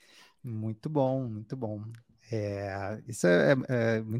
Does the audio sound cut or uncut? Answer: uncut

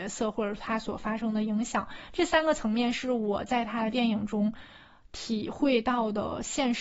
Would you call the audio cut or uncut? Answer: uncut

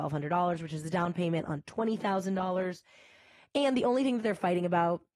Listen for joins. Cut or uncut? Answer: uncut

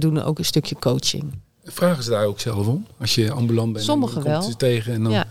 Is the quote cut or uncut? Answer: uncut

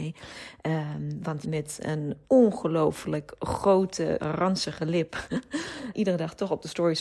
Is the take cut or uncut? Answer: cut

